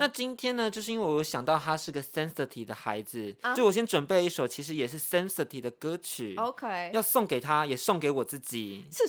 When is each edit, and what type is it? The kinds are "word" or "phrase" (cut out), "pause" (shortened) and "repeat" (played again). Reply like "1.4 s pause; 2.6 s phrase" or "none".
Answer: 3.6 s word